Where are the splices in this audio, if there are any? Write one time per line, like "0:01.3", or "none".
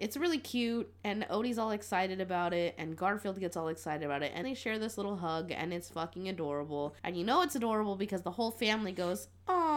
0:04.4
0:07.0